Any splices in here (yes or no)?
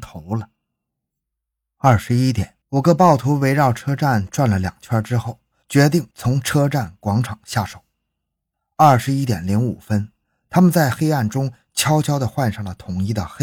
yes